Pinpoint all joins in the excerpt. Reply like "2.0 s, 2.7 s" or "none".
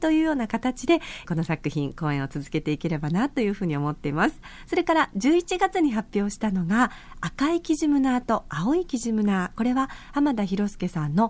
1.2 s